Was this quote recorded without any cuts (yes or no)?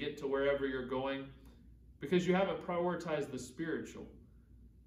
yes